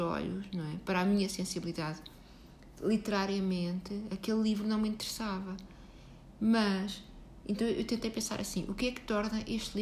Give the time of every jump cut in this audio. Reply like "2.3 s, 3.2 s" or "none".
none